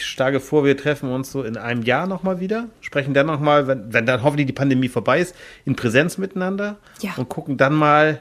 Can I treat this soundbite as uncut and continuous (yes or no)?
yes